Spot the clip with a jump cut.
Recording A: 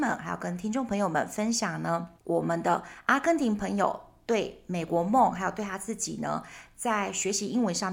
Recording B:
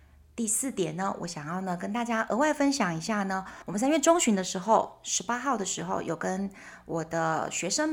A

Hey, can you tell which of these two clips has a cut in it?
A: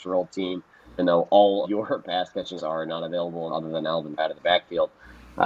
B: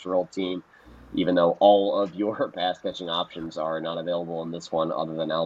A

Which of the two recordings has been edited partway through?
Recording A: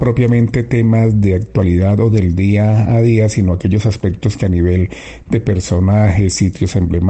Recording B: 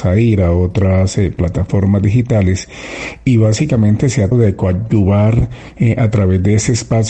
B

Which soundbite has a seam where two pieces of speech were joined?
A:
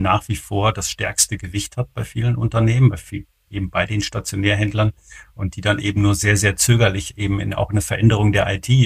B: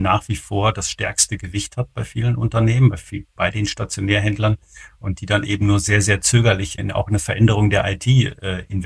B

